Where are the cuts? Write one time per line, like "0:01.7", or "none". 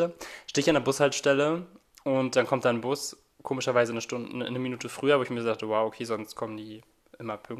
none